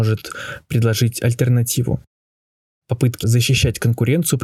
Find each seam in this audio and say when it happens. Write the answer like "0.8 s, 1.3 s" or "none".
3.2 s